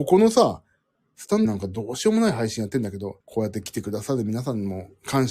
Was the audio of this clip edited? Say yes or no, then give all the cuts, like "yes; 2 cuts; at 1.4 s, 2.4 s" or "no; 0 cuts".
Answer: yes; 2 cuts; at 1.4 s, 3.2 s